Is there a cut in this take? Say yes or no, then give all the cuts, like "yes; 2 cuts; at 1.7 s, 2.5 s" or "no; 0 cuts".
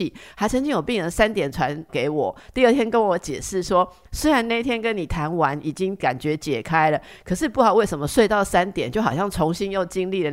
yes; 1 cut; at 1.9 s